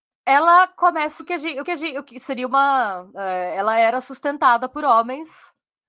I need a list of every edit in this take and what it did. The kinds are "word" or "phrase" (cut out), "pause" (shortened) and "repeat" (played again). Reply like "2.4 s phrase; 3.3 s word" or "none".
1.2 s word; 1.6 s repeat